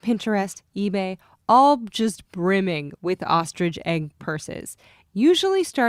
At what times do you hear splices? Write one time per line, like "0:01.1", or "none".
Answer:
none